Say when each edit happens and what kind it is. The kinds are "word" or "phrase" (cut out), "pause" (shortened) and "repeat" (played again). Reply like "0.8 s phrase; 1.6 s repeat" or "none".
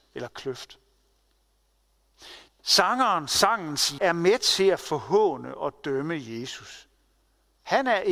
2.5 s pause; 4.0 s word